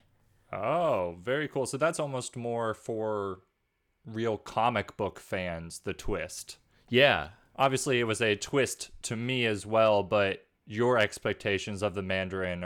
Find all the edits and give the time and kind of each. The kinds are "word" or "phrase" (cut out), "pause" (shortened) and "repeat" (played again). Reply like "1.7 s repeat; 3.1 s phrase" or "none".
none